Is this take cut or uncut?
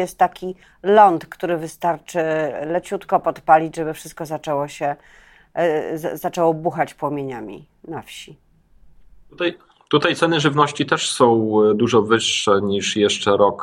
uncut